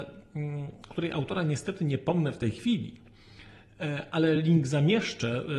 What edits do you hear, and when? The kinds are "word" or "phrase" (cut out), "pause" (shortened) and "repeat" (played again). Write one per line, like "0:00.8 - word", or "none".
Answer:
none